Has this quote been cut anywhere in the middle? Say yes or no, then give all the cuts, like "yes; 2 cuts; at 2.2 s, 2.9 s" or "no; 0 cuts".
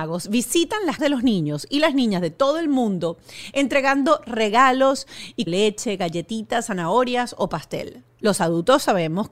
yes; 2 cuts; at 1.0 s, 5.5 s